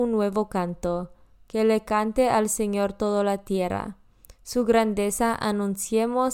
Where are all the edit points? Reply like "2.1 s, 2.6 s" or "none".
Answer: none